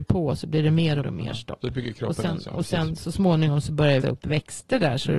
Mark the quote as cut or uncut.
cut